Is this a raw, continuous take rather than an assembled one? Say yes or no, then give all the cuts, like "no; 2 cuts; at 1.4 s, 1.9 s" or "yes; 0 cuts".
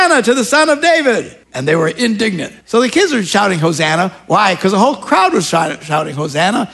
no; 2 cuts; at 1.4 s, 2.6 s